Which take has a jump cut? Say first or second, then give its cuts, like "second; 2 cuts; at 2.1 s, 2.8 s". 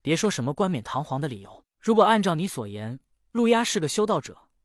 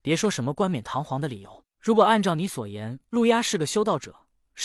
second; 1 cut; at 3.1 s